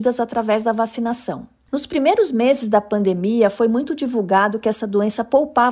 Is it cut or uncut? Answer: uncut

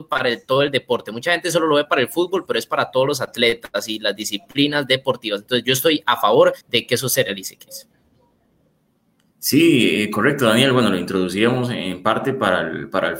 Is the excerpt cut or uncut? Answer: cut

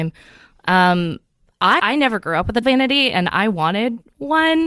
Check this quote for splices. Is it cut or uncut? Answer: cut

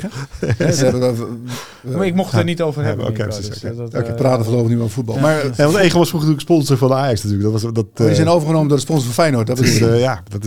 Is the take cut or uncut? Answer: cut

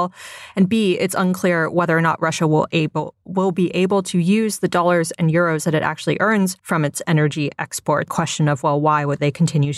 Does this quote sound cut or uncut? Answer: cut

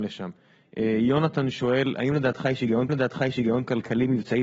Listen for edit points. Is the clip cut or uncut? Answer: cut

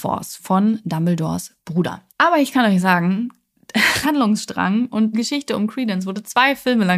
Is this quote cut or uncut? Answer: cut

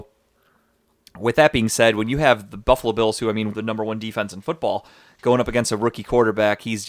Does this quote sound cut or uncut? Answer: cut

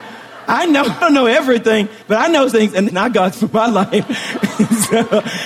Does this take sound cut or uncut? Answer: cut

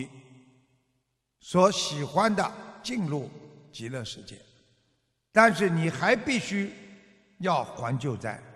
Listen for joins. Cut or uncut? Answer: uncut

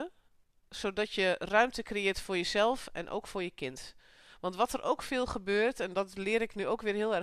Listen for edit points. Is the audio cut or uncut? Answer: uncut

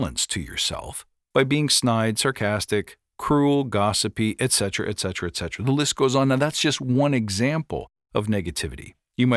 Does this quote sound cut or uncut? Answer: uncut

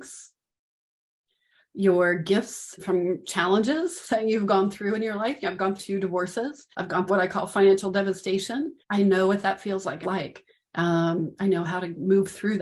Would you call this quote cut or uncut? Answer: cut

